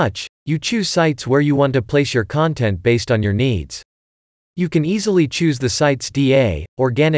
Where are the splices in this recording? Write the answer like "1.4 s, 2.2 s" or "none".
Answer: none